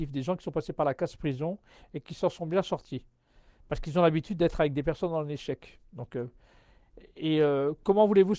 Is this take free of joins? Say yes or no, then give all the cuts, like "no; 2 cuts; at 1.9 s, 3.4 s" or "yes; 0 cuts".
yes; 0 cuts